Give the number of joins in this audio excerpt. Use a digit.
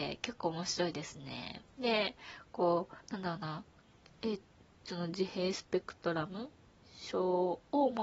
4